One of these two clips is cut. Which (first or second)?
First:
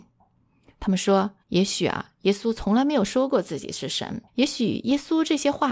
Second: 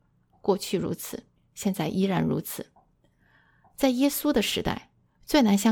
first